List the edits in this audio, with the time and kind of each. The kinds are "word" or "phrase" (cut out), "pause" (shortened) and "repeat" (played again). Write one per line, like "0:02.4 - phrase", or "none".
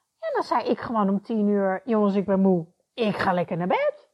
none